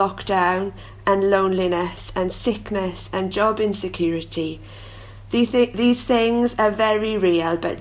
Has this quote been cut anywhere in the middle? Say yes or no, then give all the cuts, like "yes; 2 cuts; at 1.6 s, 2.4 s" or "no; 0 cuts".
no; 0 cuts